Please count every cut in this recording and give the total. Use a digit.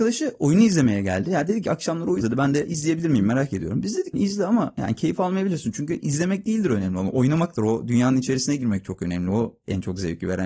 2